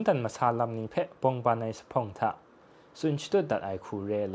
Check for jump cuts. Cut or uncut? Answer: uncut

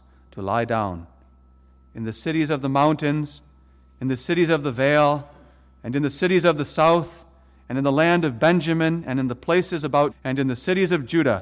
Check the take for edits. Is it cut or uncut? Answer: cut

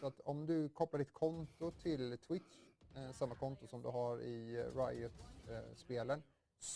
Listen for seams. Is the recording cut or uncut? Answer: uncut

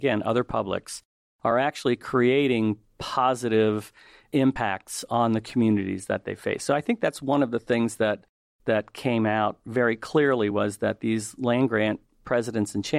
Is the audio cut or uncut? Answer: uncut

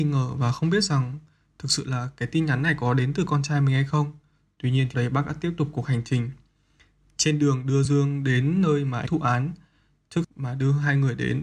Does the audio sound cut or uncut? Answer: cut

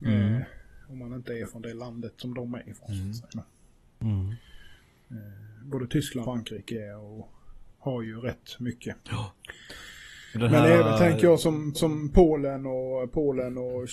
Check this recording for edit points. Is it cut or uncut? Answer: cut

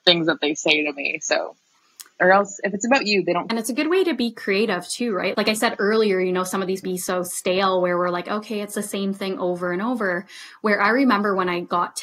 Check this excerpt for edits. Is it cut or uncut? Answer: cut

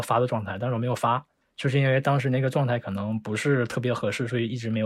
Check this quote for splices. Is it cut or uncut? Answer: uncut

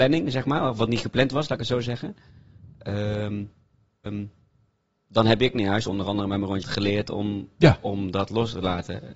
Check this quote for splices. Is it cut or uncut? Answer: cut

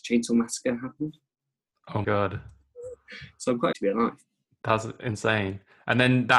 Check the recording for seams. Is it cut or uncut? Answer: cut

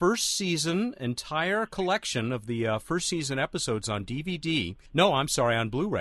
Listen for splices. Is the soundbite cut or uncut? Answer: cut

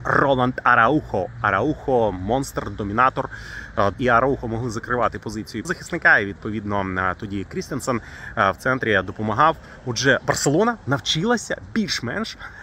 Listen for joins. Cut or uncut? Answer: cut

